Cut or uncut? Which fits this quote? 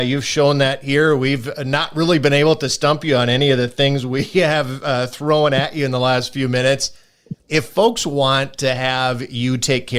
cut